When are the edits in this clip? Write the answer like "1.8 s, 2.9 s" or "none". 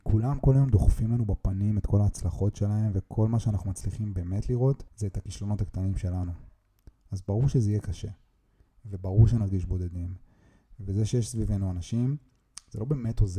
4.9 s